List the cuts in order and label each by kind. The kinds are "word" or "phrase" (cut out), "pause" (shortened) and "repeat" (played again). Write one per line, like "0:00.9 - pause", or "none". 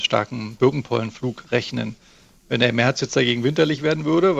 none